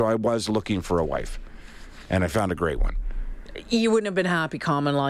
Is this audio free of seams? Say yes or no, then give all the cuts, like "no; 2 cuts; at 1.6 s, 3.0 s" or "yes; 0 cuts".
yes; 0 cuts